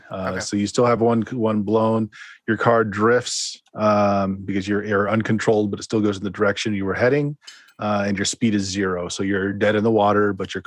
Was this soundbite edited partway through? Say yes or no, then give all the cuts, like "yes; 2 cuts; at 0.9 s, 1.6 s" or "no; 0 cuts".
no; 0 cuts